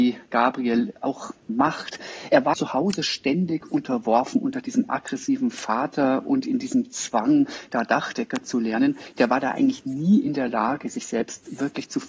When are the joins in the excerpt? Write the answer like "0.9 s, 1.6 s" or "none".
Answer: 2.5 s